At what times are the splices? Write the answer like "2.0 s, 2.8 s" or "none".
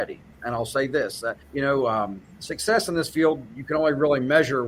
1.4 s